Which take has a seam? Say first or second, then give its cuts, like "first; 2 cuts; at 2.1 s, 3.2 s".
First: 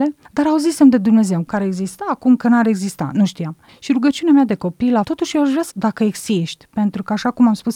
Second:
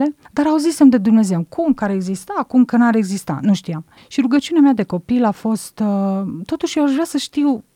first; 3 cuts; at 1.5 s, 5.0 s, 5.7 s